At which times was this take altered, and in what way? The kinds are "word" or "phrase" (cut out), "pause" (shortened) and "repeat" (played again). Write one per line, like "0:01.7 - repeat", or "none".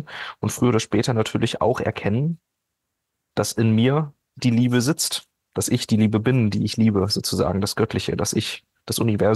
0:04.2 - pause